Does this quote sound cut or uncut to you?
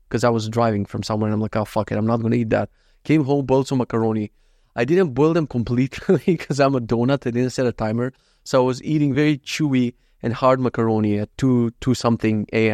uncut